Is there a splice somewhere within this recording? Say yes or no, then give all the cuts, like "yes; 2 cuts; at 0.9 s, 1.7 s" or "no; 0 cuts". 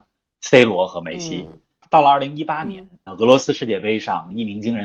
yes; 1 cut; at 3.1 s